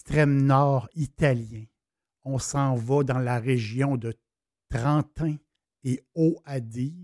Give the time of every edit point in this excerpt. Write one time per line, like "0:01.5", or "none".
none